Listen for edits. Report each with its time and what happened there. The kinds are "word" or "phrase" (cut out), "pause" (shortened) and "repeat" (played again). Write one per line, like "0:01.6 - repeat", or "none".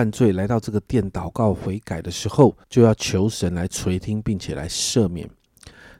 0:02.6 - pause

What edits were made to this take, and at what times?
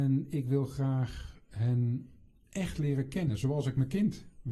none

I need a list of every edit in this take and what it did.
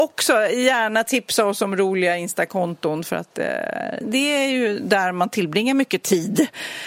0:04.0 - word

